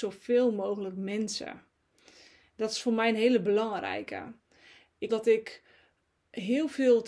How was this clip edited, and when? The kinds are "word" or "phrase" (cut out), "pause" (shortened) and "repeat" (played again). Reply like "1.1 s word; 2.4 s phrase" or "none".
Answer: 5.1 s word